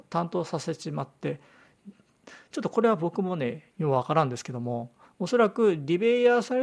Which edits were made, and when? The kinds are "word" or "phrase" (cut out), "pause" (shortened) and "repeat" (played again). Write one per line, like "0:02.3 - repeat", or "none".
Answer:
0:03.7 - pause
0:05.1 - pause

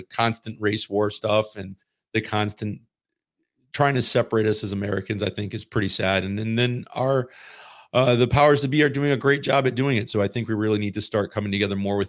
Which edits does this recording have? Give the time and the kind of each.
none

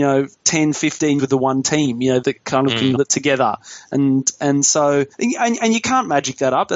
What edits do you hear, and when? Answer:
0:01.2 - word
0:02.2 - word
0:03.0 - word
0:05.1 - pause

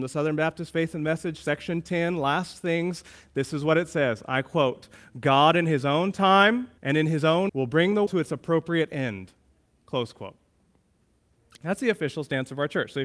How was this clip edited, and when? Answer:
0:06.8 - pause
0:07.5 - word
0:08.1 - word

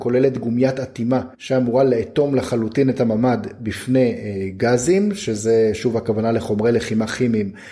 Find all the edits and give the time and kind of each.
0:01.3 - pause

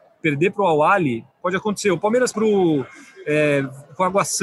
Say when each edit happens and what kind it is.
0:01.3 - pause
0:02.3 - word

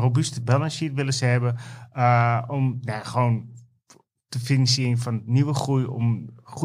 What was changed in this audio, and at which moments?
none

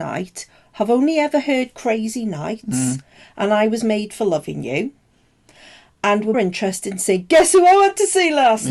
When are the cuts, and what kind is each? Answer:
0:06.3 - word

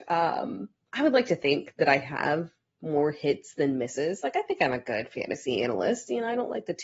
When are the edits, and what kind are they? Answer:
none

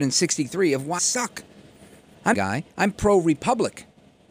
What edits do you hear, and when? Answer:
0:01.0 - word
0:02.3 - phrase
0:02.7 - pause

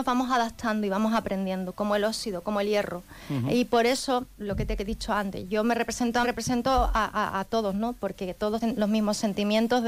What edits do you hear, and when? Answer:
0:04.4 - word
0:06.2 - phrase
0:08.6 - word

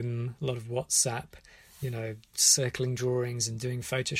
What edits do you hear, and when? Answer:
none

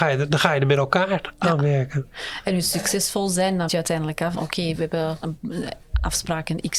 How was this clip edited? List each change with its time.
0:03.7 - word
0:04.3 - phrase
0:05.2 - word

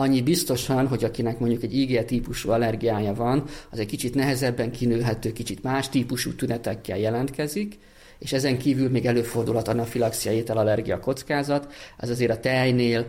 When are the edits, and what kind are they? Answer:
none

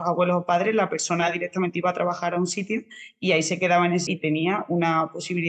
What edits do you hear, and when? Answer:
0:04.1 - word

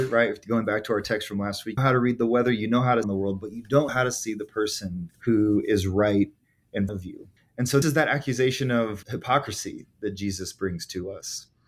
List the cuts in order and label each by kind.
0:01.8 - phrase
0:03.0 - phrase
0:03.9 - word
0:05.1 - pause
0:06.9 - word
0:07.4 - pause
0:07.8 - word
0:09.0 - word

